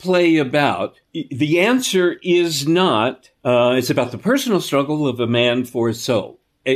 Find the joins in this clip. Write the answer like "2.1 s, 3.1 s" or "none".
1.0 s, 3.4 s